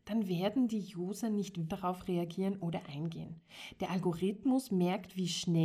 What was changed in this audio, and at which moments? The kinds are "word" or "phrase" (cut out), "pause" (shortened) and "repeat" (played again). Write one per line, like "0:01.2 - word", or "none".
0:01.7 - word